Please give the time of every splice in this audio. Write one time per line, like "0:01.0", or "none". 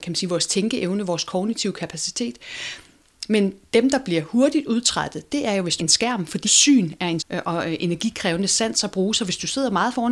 0:05.8
0:06.4
0:07.2